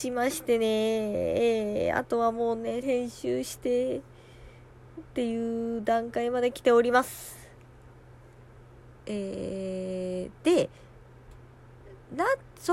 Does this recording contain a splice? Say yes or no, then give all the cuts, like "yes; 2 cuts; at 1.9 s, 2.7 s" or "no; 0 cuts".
yes; 1 cut; at 2.8 s